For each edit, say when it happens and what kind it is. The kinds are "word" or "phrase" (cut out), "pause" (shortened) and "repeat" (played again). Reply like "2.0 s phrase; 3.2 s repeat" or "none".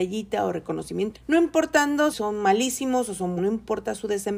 1.1 s word; 2.1 s word; 3.4 s word